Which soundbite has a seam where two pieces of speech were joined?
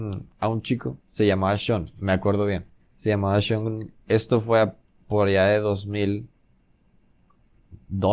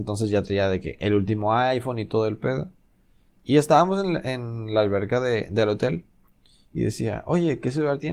first; 3 cuts; at 1.0 s, 2.8 s, 4.0 s

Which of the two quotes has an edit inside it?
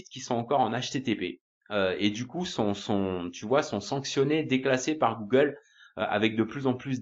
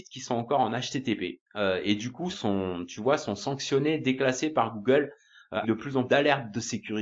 second; 4 cuts; at 1.4 s, 2.3 s, 5.6 s, 6.1 s

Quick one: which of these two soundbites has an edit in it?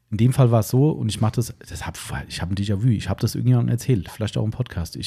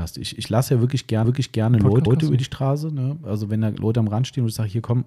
second; 2 cuts; at 1.2 s, 2.1 s

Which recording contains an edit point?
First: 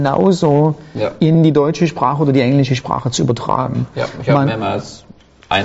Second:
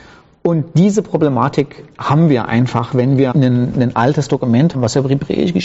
second; 2 cuts; at 3.3 s, 4.7 s

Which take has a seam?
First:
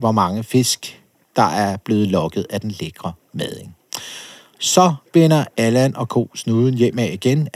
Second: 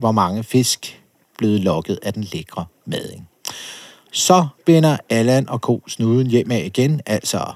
second; 1 cut; at 1.3 s

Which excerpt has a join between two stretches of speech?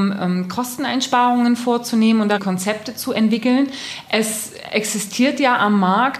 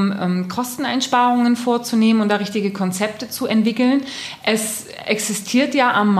first; 1 cut; at 2.4 s

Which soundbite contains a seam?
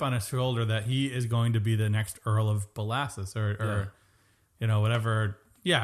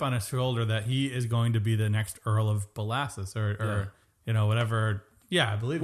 second; 1 cut; at 4.0 s

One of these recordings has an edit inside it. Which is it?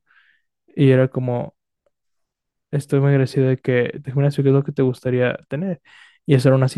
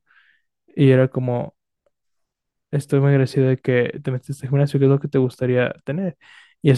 first; 1 cut; at 4.0 s

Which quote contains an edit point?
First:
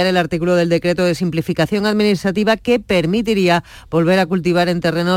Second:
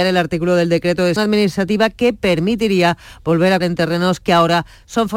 second; 2 cuts; at 1.2 s, 3.6 s

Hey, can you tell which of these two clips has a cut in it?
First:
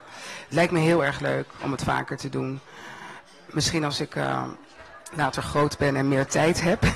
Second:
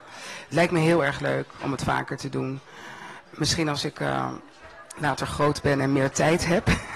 second; 1 cut; at 3.3 s

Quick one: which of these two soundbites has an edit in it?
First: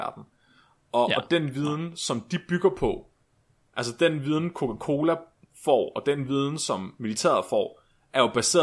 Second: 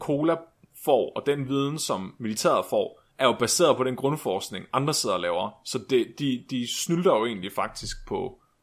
second; 2 cuts; at 3.1 s, 6.5 s

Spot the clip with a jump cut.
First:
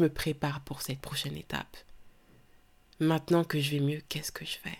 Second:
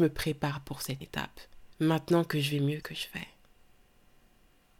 second; 3 cuts; at 1.0 s, 1.7 s, 2.8 s

